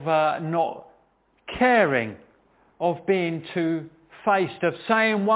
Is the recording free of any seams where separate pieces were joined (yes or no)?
yes